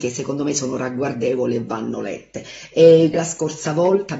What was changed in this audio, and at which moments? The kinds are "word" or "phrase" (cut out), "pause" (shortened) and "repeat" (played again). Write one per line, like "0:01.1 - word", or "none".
0:03.1 - word